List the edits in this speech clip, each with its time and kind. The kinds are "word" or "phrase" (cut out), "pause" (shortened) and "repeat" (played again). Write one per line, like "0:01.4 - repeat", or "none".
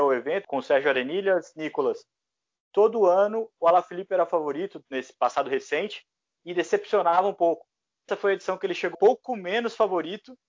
0:08.1 - word
0:08.9 - word